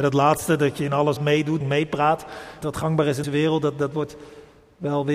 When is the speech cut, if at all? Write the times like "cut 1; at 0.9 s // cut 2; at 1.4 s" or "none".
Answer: cut 1; at 1.2 s // cut 2; at 1.6 s // cut 3; at 2.6 s // cut 4; at 3.2 s